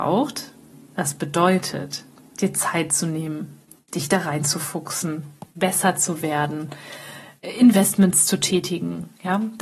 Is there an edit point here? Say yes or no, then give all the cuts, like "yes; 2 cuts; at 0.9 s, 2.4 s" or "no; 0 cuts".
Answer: no; 0 cuts